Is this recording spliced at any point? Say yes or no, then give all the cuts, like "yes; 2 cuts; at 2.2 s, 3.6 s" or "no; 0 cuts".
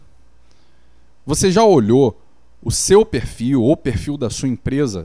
no; 0 cuts